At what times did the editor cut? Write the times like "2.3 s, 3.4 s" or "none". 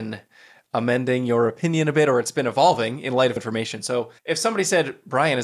3.4 s, 4.2 s